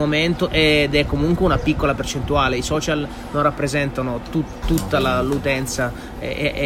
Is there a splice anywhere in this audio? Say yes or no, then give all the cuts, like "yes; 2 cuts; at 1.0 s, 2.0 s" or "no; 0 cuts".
no; 0 cuts